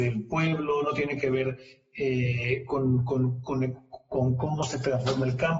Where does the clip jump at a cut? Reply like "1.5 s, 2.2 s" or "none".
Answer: none